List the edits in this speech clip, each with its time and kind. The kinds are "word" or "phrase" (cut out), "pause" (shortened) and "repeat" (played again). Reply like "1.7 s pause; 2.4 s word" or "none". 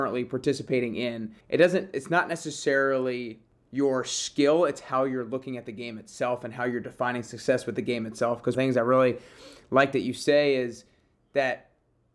1.4 s pause; 3.5 s pause; 8.5 s phrase